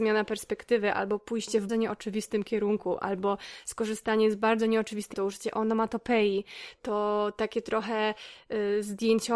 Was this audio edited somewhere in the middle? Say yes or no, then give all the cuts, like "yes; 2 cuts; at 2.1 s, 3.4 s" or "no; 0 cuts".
yes; 2 cuts; at 1.7 s, 5.1 s